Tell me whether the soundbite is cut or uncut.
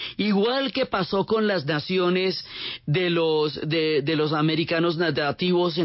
uncut